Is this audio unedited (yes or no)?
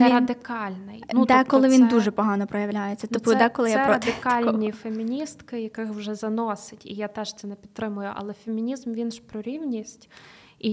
yes